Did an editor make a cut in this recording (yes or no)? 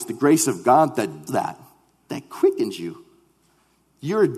yes